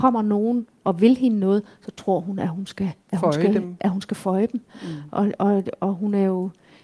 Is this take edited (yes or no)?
yes